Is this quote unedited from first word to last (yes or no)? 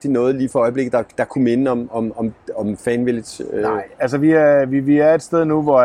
yes